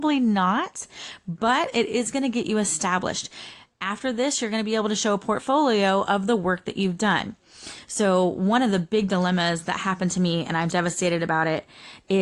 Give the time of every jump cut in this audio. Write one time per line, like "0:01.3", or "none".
0:10.7